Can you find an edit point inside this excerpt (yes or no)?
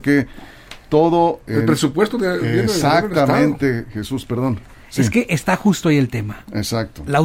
no